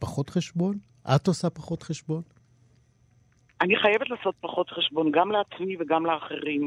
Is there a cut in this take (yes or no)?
no